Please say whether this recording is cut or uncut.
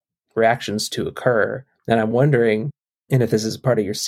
uncut